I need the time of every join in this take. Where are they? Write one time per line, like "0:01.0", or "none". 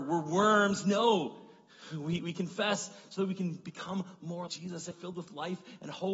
0:04.5
0:04.9